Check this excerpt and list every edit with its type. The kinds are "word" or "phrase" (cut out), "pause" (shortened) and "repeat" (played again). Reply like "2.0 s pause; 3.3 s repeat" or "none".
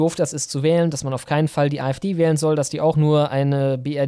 none

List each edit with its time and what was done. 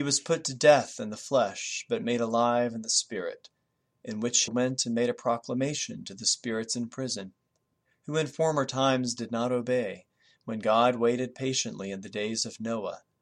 4.5 s word

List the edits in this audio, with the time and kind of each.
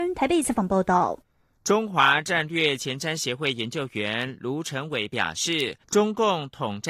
5.8 s pause

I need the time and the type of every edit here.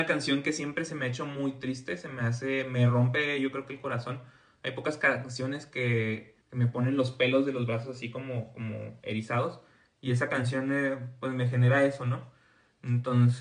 6.4 s pause

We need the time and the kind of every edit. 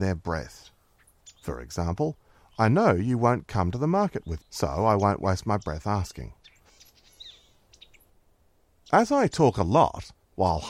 4.4 s word

